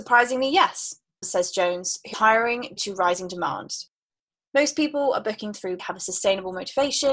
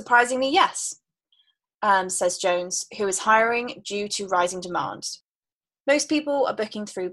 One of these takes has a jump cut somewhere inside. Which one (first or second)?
first